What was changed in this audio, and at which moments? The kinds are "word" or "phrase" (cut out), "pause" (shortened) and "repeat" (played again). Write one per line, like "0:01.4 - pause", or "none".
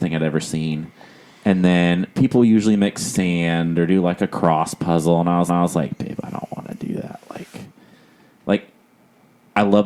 0:05.5 - repeat